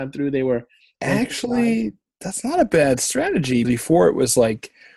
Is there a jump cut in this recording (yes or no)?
yes